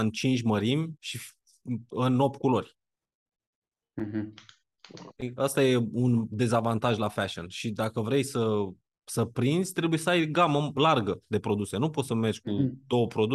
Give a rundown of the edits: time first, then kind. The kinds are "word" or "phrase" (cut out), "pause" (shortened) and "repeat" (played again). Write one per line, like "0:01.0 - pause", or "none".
0:01.0 - pause
0:08.8 - pause